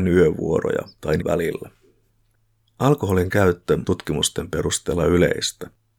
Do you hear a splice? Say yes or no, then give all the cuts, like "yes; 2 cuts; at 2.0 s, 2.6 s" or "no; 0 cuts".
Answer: yes; 2 cuts; at 1.2 s, 3.8 s